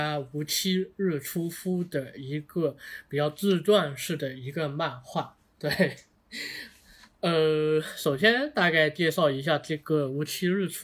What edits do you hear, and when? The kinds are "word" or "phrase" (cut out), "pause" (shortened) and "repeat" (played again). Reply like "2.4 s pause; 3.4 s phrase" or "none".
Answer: none

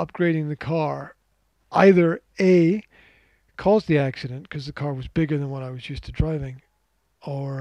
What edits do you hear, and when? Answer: none

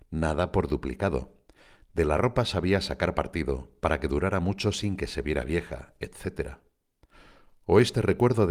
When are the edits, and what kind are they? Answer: none

